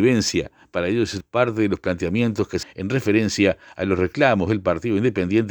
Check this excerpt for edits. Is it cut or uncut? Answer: cut